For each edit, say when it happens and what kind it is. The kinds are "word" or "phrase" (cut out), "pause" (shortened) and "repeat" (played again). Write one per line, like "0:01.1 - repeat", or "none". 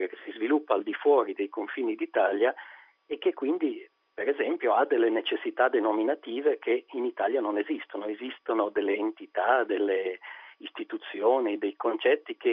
none